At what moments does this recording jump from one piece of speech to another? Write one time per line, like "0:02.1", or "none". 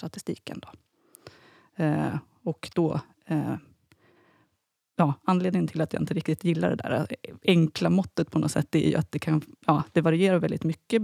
none